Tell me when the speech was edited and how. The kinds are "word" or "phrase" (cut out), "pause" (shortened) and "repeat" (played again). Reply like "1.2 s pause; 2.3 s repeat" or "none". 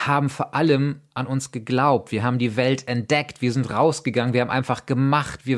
none